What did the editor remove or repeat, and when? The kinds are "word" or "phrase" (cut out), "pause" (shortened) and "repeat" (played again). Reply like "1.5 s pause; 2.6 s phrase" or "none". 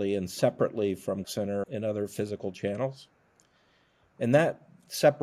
1.2 s word; 1.6 s word